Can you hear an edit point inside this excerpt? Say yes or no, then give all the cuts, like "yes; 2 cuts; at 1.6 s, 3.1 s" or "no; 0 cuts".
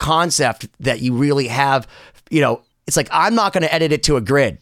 yes; 1 cut; at 2.7 s